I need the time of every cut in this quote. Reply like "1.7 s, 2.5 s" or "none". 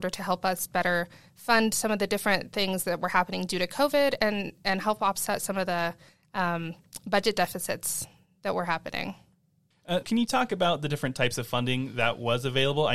10.0 s